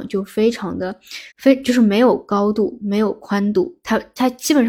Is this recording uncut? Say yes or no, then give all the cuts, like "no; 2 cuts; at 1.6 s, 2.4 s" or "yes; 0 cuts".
no; 1 cut; at 1.3 s